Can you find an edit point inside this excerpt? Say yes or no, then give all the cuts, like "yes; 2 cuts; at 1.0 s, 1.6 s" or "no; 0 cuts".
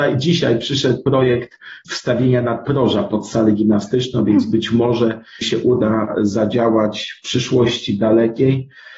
yes; 1 cut; at 5.4 s